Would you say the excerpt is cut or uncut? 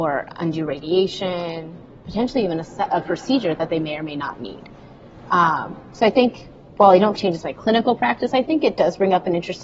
cut